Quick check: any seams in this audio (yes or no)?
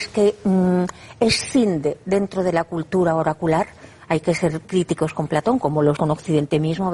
yes